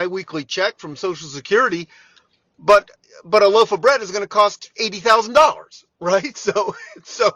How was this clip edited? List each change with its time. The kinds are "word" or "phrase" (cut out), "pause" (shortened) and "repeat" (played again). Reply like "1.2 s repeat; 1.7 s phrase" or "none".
none